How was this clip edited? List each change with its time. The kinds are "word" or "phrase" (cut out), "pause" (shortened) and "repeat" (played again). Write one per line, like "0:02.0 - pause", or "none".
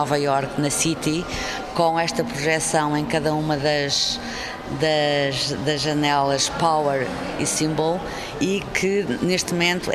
none